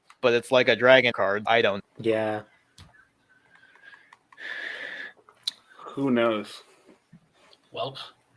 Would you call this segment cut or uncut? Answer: cut